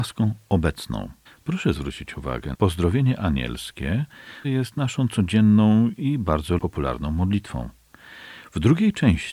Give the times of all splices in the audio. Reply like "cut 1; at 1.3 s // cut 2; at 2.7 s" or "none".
cut 1; at 1.3 s // cut 2; at 2.5 s // cut 3; at 4.4 s // cut 4; at 6.6 s